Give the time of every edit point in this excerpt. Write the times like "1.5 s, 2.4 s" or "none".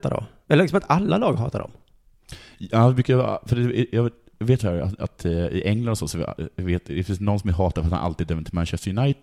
4.6 s